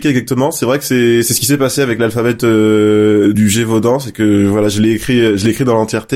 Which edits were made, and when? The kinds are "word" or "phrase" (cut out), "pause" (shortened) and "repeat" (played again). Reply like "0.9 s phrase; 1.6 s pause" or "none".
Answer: 3.3 s word